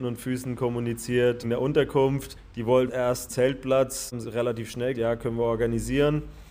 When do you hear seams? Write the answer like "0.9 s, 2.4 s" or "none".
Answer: 1.4 s, 2.9 s, 3.3 s, 4.2 s, 4.9 s